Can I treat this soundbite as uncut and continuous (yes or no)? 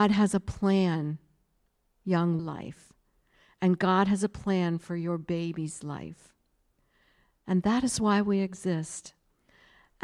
no